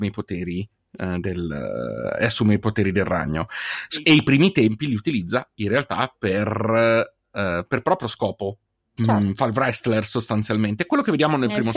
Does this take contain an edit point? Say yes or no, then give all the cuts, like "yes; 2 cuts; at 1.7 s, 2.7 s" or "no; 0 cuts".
no; 0 cuts